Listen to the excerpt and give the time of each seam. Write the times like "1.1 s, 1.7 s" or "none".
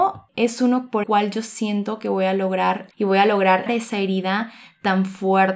1.0 s, 2.9 s, 3.7 s